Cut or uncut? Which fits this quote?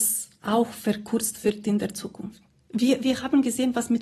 uncut